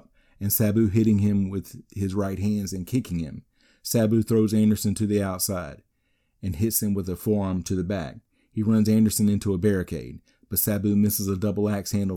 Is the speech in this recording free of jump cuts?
yes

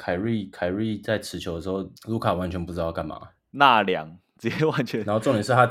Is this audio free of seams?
no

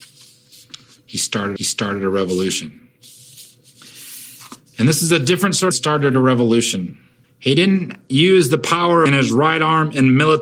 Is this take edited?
yes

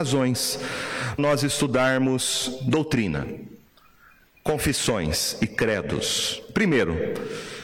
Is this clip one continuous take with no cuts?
no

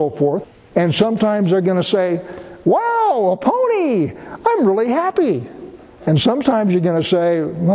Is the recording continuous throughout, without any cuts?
yes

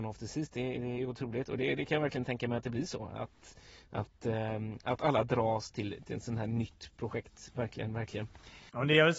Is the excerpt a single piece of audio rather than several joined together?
yes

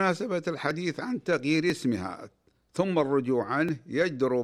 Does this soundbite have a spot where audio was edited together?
no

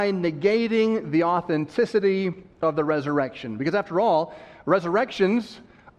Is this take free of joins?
yes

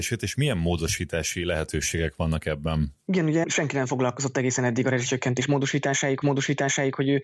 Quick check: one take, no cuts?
no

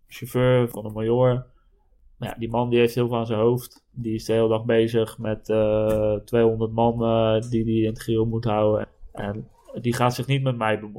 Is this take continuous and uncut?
yes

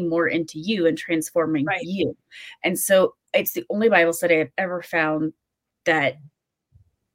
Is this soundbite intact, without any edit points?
yes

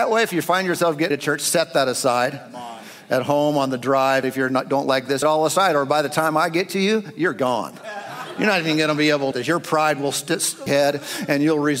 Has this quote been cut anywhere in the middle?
yes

